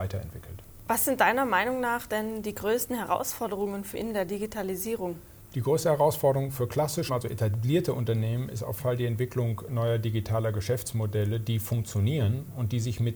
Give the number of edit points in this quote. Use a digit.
3